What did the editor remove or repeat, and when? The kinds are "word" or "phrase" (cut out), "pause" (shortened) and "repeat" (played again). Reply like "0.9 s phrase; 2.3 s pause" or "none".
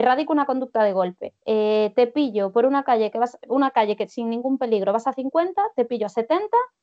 1.4 s pause